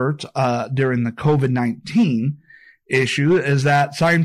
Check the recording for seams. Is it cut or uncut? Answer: uncut